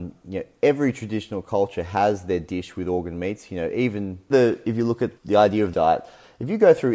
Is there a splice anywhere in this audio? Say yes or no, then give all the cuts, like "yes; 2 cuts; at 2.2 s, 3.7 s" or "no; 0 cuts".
yes; 3 cuts; at 4.3 s, 5.2 s, 5.7 s